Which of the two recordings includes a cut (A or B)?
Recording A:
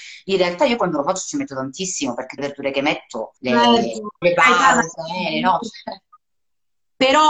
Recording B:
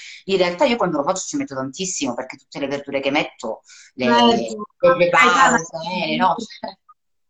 A